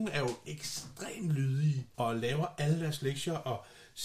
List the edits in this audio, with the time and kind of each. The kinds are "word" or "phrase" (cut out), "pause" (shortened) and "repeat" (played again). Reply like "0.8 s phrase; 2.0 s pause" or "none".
1.9 s pause